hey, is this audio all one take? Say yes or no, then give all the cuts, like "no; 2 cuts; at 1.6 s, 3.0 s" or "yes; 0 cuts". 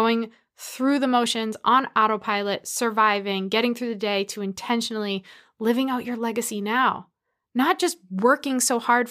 yes; 0 cuts